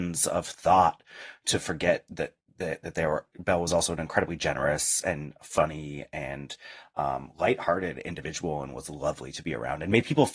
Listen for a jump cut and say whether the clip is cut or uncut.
uncut